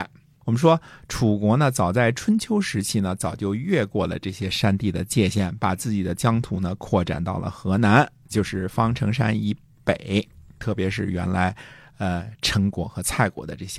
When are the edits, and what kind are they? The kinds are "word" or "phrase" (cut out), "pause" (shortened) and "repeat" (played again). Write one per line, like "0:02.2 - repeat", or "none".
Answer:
none